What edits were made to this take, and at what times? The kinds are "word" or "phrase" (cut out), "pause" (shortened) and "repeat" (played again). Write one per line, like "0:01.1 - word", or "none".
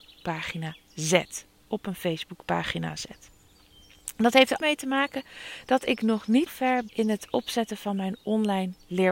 0:04.6 - word
0:06.5 - word
0:06.9 - word